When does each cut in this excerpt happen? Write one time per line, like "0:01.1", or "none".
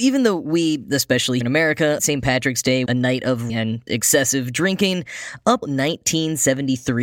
0:01.4
0:02.0
0:02.9
0:03.5
0:03.9
0:05.6